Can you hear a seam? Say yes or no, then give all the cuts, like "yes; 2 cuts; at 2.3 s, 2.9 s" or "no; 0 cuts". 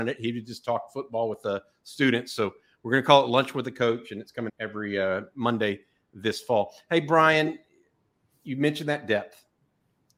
yes; 1 cut; at 4.5 s